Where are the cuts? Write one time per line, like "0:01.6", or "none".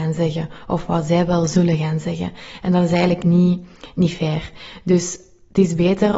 none

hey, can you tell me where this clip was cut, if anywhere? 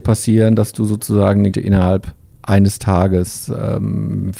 0:01.5

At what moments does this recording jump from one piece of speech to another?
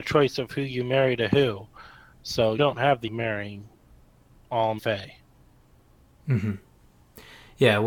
0:02.6
0:03.1
0:04.8

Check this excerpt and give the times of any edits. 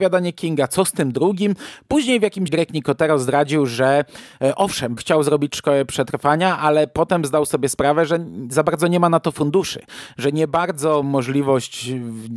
0:02.5
0:05.0
0:11.0

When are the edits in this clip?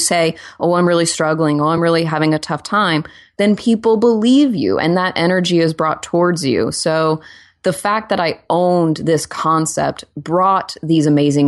none

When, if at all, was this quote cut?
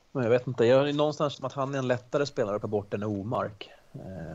0:01.3
0:02.6

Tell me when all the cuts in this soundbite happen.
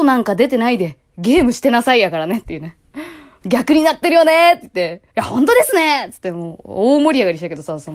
0:02.9
0:05.1

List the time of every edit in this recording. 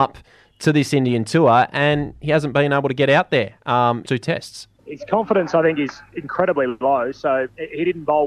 0:04.0
0:04.8

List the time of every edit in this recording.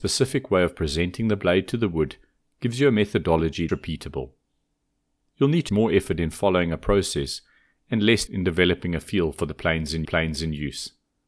0:03.7
0:05.7
0:08.3
0:10.0

